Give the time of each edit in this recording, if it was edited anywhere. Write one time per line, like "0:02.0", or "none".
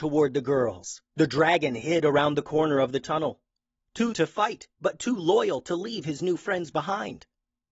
0:01.1
0:04.1